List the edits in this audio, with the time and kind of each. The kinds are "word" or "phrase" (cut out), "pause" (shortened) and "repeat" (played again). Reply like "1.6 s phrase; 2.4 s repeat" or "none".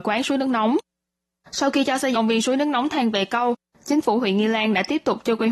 2.1 s word